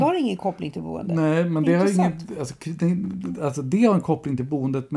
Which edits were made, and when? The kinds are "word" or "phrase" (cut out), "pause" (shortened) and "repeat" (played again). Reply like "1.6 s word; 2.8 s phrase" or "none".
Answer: none